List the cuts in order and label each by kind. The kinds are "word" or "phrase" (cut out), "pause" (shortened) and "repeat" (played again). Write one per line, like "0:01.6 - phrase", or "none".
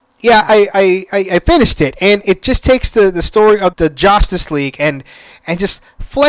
0:03.7 - word